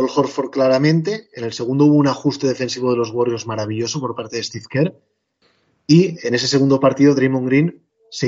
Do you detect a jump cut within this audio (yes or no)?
no